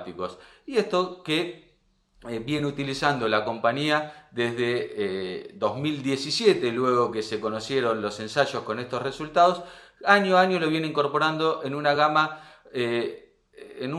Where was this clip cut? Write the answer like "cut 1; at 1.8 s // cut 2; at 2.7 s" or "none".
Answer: none